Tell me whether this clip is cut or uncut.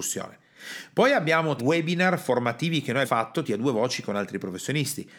cut